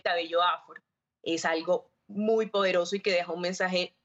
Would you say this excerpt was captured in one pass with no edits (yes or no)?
yes